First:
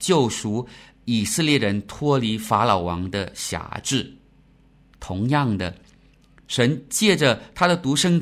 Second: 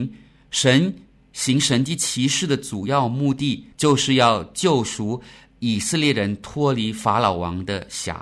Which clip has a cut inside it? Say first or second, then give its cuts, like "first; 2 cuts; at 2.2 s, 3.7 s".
second; 1 cut; at 3.7 s